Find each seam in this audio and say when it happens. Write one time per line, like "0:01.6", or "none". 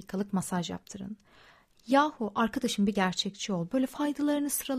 none